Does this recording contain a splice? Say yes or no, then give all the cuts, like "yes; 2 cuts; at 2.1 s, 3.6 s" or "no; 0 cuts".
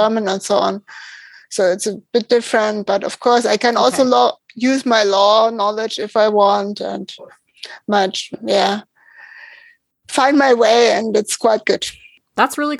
no; 0 cuts